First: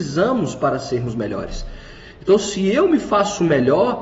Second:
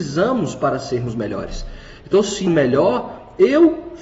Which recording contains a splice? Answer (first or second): second